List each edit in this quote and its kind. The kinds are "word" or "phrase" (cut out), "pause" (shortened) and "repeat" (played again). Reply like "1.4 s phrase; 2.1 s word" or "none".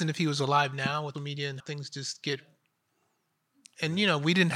1.1 s word; 1.6 s word